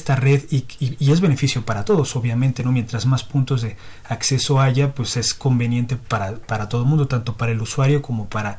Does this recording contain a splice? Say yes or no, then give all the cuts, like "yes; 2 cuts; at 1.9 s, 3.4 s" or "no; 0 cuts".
no; 0 cuts